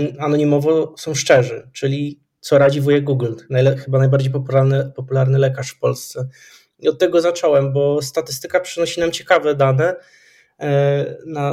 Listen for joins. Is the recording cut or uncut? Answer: uncut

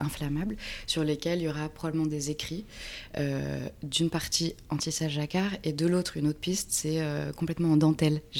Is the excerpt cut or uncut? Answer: uncut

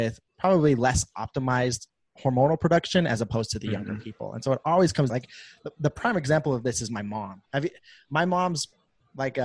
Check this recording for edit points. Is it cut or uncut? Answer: cut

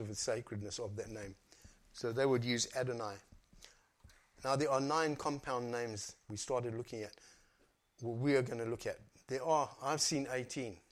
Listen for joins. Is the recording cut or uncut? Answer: uncut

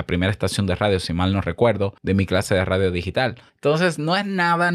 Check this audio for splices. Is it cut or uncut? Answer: cut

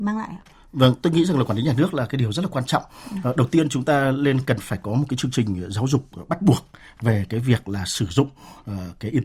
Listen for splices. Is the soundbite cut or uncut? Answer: uncut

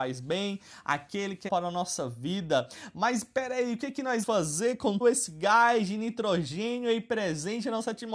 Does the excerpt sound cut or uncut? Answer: cut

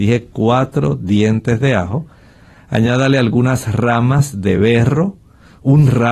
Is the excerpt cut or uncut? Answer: uncut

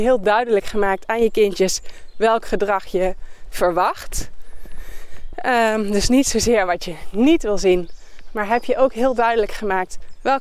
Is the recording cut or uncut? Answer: uncut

